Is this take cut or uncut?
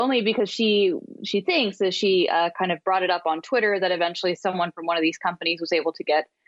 uncut